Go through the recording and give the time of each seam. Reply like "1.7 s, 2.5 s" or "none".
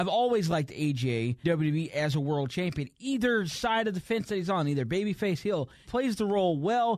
1.4 s, 5.8 s